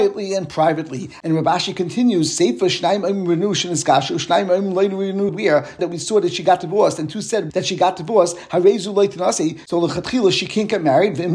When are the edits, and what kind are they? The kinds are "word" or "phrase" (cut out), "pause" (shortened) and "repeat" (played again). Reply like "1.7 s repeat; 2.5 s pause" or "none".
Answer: 5.3 s phrase; 5.8 s phrase; 7.5 s phrase